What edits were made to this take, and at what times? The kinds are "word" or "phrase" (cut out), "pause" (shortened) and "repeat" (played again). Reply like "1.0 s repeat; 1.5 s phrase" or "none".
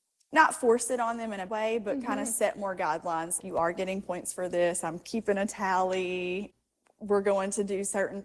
1.5 s word; 3.4 s word